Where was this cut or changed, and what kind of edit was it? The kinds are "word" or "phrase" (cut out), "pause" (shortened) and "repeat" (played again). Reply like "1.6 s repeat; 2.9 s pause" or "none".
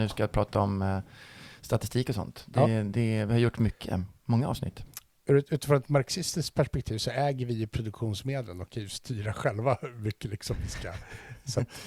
none